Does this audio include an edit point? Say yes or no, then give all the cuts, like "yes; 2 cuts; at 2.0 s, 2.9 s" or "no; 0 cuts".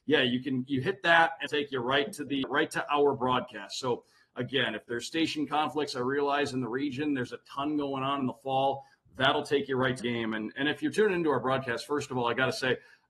yes; 3 cuts; at 1.5 s, 2.4 s, 10.0 s